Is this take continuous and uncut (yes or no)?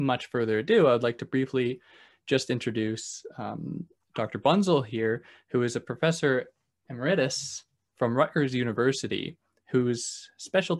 yes